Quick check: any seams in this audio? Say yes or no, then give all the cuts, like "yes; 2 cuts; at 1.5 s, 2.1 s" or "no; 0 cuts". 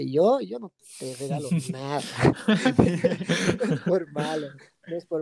no; 0 cuts